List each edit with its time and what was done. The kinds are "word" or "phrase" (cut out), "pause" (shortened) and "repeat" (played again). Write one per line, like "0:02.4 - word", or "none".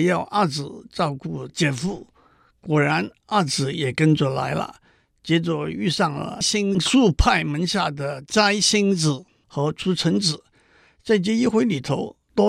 none